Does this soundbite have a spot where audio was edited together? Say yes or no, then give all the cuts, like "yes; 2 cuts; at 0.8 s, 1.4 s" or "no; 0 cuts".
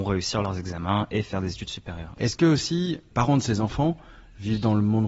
yes; 1 cut; at 3.1 s